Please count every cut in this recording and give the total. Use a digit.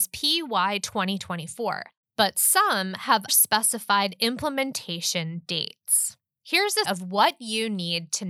3